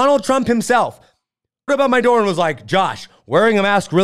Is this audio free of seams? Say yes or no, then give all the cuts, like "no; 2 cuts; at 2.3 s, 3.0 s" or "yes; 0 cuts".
no; 1 cut; at 1.7 s